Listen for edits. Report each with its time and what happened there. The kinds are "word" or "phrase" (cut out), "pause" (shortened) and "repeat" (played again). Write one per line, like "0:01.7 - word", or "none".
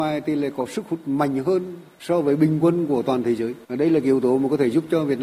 0:03.6 - pause